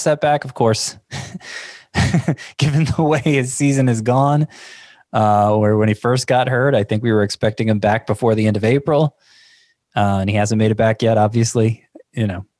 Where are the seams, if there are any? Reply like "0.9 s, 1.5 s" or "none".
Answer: none